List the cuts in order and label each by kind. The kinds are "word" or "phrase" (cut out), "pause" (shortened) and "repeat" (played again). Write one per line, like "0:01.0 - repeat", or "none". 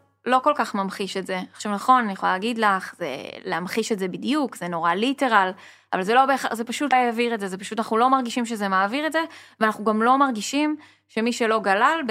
0:06.9 - word